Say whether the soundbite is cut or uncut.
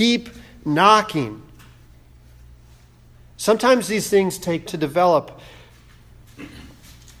cut